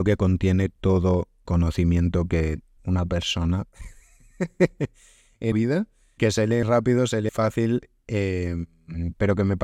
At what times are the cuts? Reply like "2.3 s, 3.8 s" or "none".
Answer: 1.5 s, 2.8 s, 5.5 s, 6.2 s, 6.6 s, 7.3 s